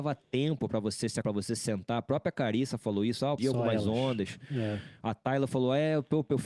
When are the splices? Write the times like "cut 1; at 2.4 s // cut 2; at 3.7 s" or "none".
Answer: cut 1; at 1.2 s // cut 2; at 3.4 s

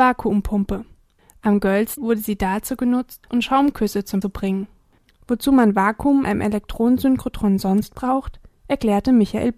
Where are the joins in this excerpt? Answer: cut 1; at 2.0 s // cut 2; at 3.3 s // cut 3; at 4.2 s // cut 4; at 6.2 s

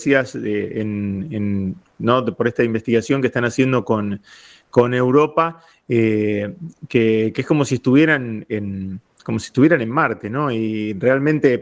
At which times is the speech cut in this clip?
none

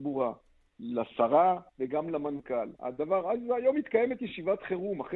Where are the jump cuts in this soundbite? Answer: cut 1; at 1.7 s // cut 2; at 2.8 s

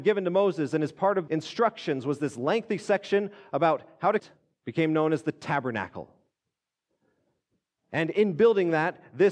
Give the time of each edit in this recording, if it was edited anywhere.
cut 1; at 1.3 s // cut 2; at 4.2 s // cut 3; at 4.5 s

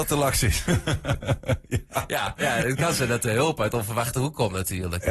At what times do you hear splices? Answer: none

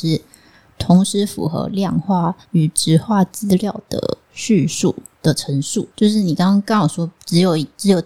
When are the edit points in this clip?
cut 1; at 2.4 s // cut 2; at 4.2 s // cut 3; at 5.9 s

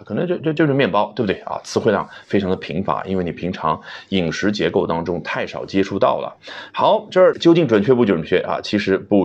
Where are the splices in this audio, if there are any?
cut 1; at 7.3 s

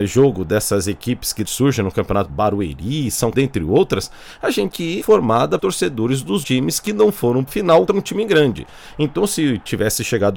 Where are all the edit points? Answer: cut 1; at 1.4 s // cut 2; at 2.3 s // cut 3; at 3.3 s // cut 4; at 4.7 s // cut 5; at 5.0 s // cut 6; at 5.6 s // cut 7; at 6.4 s // cut 8; at 7.5 s // cut 9; at 7.9 s

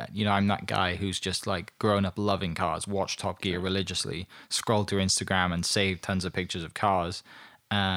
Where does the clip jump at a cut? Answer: none

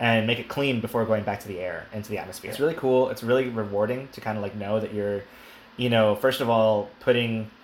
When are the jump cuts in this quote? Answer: none

